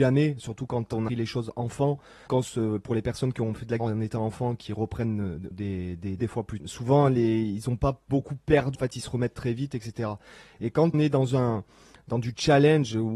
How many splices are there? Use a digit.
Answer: 8